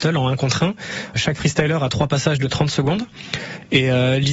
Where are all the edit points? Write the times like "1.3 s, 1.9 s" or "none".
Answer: 1.2 s